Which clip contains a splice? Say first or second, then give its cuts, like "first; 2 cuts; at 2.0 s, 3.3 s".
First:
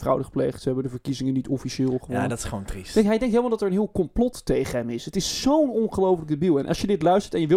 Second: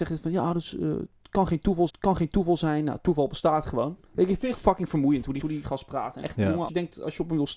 second; 6 cuts; at 1.9 s, 4.0 s, 4.5 s, 5.4 s, 6.2 s, 6.7 s